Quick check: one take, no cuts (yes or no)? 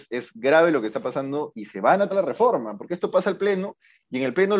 no